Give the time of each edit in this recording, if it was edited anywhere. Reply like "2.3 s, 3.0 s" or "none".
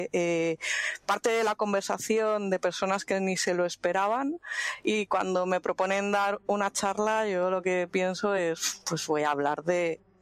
none